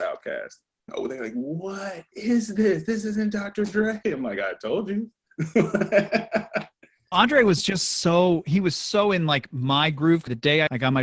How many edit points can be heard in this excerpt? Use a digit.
0